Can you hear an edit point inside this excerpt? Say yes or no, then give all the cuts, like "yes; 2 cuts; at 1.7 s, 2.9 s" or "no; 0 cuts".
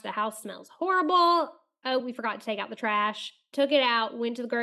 no; 0 cuts